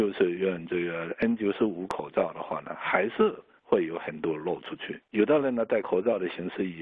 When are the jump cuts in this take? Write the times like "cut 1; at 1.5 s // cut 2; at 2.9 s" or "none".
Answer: cut 1; at 5.1 s